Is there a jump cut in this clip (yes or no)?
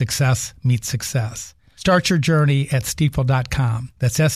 no